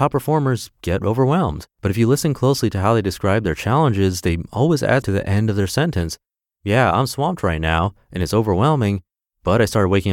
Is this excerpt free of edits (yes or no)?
no